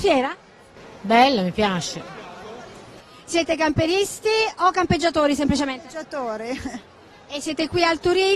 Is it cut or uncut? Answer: uncut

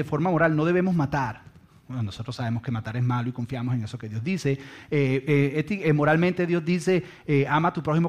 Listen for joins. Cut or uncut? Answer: uncut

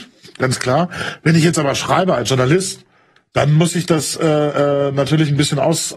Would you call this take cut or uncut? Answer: uncut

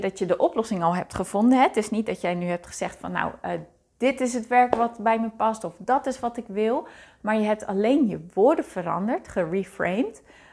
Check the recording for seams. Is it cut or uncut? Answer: uncut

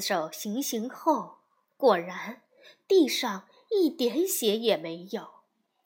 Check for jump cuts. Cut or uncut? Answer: uncut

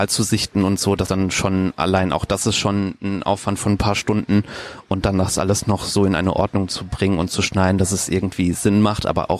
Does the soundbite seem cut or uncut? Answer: cut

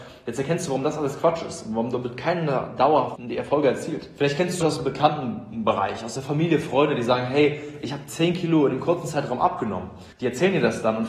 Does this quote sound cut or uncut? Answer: cut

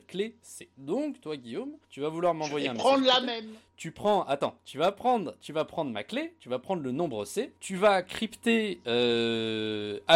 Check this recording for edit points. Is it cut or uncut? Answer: cut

